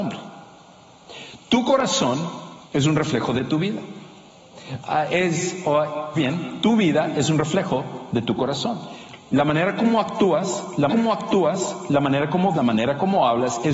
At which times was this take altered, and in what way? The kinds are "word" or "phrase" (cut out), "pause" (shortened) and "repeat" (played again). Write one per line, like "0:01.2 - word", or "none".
0:02.6 - pause
0:06.1 - phrase
0:10.9 - repeat
0:12.5 - word